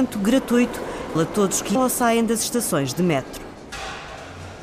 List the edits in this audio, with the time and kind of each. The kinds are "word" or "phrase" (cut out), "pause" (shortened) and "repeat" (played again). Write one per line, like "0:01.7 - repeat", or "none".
0:01.1 - word
0:01.7 - word